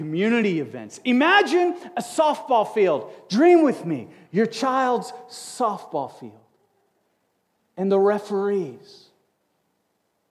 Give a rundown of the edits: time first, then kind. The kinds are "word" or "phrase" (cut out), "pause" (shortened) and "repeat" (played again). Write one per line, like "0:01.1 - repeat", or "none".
none